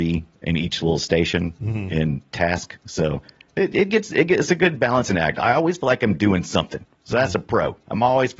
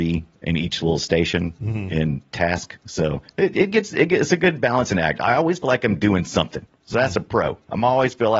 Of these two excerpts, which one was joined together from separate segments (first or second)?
second